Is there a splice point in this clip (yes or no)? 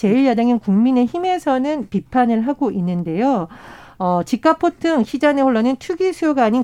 no